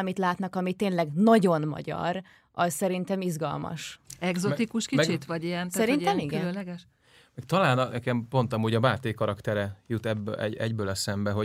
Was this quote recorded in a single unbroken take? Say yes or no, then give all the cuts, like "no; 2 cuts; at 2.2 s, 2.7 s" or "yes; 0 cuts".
no; 1 cut; at 7.9 s